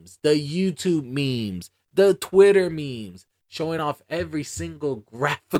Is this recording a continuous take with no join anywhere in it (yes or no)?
yes